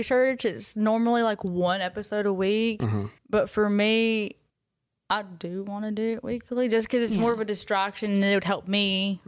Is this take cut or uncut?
cut